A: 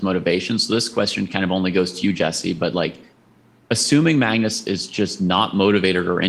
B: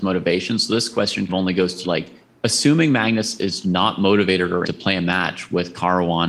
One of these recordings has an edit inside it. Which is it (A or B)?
B